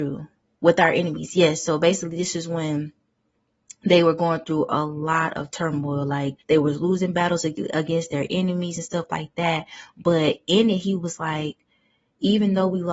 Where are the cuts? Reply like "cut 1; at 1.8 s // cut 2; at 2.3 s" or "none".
cut 1; at 6.4 s